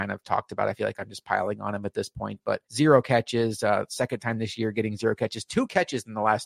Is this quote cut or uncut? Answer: cut